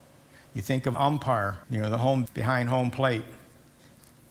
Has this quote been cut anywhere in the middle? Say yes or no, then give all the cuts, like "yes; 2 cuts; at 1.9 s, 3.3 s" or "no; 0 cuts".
yes; 3 cuts; at 0.9 s, 1.6 s, 2.3 s